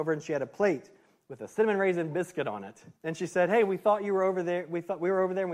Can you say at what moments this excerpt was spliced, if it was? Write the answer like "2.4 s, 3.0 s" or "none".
3.0 s